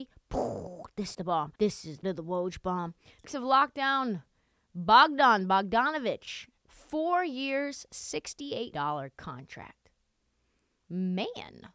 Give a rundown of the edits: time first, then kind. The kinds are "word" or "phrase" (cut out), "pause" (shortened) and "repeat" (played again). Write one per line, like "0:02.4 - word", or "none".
0:01.1 - word
0:01.5 - pause
0:02.0 - word
0:03.2 - phrase
0:06.6 - pause
0:08.7 - word

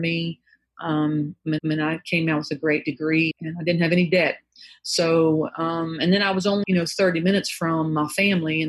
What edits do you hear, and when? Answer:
0:01.6 - repeat
0:03.3 - word
0:06.6 - word

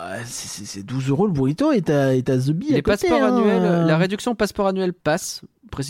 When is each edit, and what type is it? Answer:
0:05.0 - pause

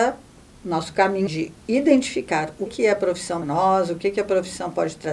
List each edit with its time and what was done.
0:01.3 - word
0:02.7 - word
0:03.4 - word

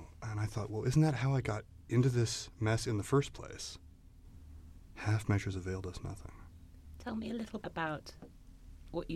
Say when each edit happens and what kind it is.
0:07.6 - word

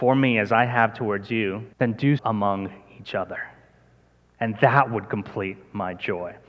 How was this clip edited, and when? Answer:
0:01.7 - pause
0:02.2 - word

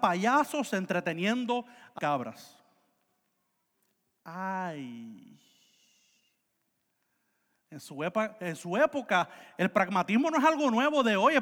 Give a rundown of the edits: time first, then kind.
0:02.0 - word

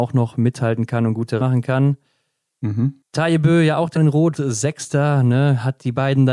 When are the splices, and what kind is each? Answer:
0:01.4 - word
0:04.0 - word
0:04.3 - word

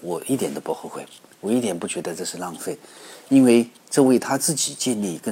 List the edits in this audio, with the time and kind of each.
0:03.8 - pause

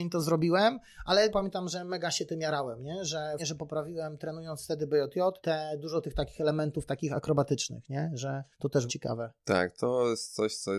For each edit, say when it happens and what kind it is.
0:01.3 - word
0:03.4 - word
0:05.4 - pause
0:08.5 - pause
0:08.9 - word

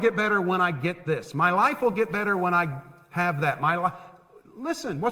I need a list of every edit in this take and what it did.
none

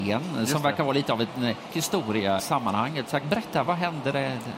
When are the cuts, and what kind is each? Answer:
0:01.7 - word
0:02.4 - word
0:03.2 - word
0:03.7 - word

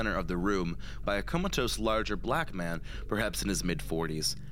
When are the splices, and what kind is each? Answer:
0:01.0 - phrase

